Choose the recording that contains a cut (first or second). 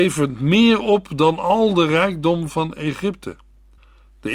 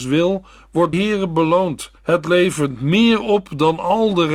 second